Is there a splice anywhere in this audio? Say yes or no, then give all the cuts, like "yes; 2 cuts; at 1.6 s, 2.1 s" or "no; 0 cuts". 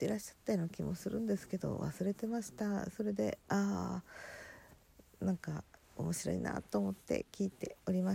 no; 0 cuts